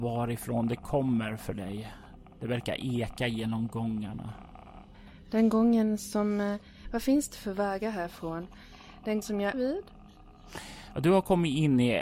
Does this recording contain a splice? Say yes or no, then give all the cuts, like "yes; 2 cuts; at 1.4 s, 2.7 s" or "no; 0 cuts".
yes; 2 cuts; at 9.2 s, 9.5 s